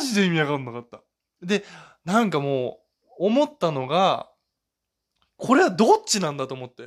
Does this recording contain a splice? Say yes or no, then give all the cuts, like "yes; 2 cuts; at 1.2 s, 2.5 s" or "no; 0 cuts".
no; 0 cuts